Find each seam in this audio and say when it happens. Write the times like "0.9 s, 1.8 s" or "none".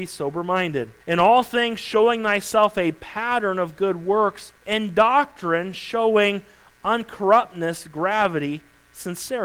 1.0 s, 4.6 s